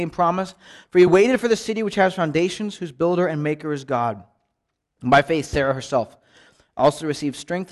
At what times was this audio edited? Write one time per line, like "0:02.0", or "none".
none